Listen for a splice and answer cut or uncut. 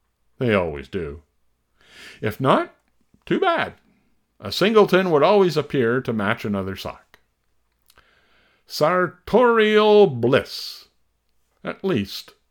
uncut